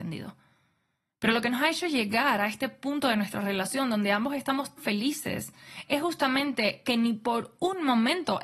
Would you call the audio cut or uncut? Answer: cut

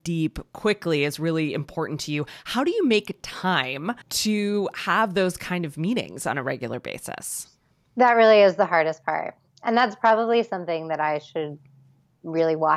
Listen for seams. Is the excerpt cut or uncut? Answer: cut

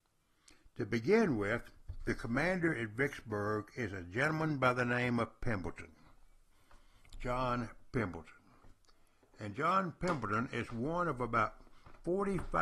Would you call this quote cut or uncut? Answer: uncut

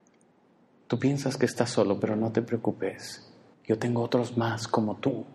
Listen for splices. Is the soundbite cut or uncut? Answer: cut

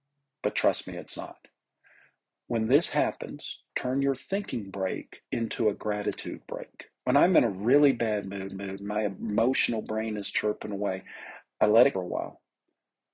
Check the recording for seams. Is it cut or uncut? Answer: cut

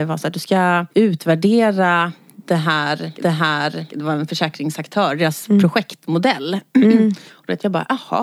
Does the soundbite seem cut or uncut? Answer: cut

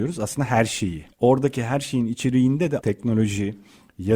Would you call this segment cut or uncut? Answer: cut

